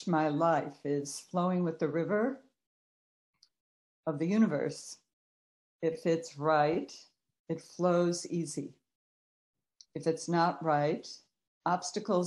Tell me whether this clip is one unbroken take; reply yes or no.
yes